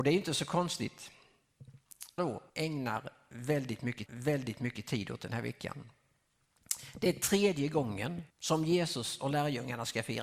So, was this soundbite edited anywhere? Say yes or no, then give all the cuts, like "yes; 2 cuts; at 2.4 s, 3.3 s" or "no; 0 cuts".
yes; 4 cuts; at 2.2 s, 2.5 s, 4.1 s, 8.3 s